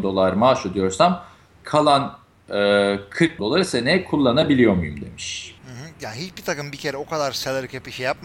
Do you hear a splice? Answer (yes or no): yes